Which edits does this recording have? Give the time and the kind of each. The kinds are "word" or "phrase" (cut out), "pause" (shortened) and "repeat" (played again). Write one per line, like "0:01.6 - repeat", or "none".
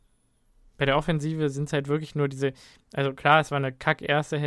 none